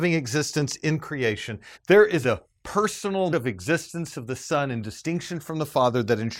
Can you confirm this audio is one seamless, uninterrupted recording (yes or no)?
no